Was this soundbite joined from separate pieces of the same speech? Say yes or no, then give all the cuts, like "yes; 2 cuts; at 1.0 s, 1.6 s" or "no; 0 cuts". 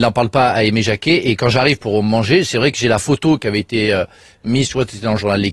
no; 0 cuts